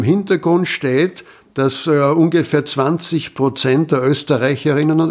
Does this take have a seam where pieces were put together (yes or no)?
no